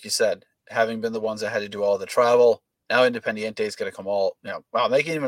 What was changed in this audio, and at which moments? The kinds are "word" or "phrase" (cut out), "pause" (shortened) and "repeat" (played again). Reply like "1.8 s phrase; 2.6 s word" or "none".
none